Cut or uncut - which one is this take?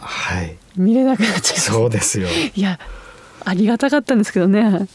uncut